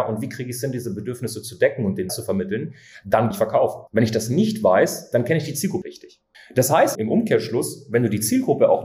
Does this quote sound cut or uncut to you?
cut